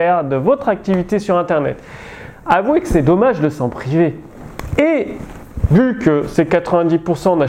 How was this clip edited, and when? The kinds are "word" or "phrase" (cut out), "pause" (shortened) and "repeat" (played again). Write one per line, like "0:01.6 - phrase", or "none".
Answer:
none